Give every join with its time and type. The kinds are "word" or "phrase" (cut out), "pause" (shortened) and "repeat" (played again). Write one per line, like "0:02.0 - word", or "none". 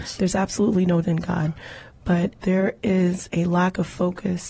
0:01.0 - word
0:02.4 - word